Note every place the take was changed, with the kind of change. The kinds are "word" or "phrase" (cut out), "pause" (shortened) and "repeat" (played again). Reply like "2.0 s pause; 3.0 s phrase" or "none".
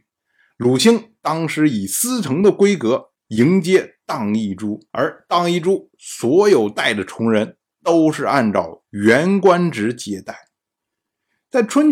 3.2 s pause; 4.9 s pause

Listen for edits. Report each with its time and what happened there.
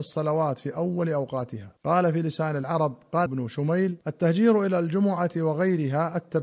1.8 s pause; 3.3 s word; 4.0 s pause

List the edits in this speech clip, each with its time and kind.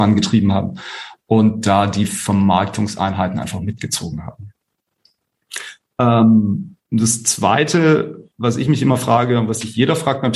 6.8 s pause

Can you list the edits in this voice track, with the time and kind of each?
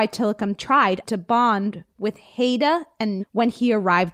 1.0 s word; 3.2 s word

